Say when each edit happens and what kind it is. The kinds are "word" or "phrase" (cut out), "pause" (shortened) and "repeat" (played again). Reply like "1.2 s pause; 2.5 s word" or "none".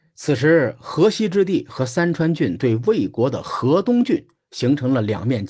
none